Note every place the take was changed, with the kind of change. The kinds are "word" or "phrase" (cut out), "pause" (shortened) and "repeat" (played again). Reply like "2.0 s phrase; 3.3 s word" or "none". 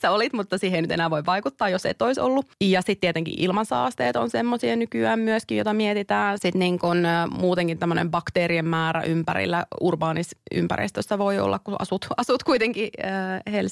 none

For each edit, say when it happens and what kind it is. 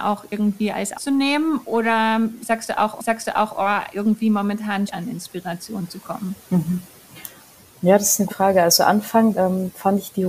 0.9 s word; 3.0 s repeat; 4.9 s word; 6.4 s pause; 8.3 s word; 9.3 s phrase

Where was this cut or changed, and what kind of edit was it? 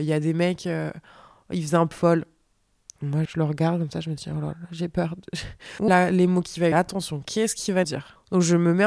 1.9 s word; 3.3 s word; 4.5 s word; 5.9 s word; 6.7 s word; 7.8 s word

